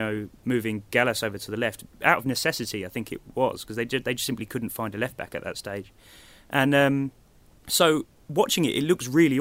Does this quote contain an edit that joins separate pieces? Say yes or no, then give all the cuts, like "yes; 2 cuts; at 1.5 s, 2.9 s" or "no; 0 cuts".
no; 0 cuts